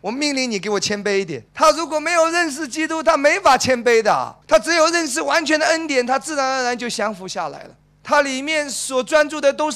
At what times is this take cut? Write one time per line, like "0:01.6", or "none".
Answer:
0:01.5
0:04.4
0:07.8